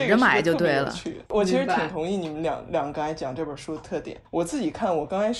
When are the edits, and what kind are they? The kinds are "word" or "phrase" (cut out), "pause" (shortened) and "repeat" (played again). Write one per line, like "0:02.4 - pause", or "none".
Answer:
0:01.3 - pause
0:04.2 - pause